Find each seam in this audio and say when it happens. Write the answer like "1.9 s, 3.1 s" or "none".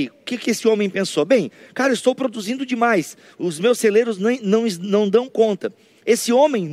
none